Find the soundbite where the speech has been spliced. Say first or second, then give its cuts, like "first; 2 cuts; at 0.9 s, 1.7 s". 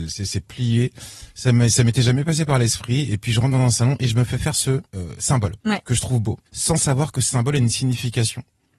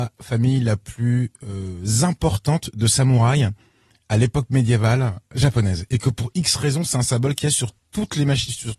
first; 3 cuts; at 4.9 s, 5.6 s, 6.5 s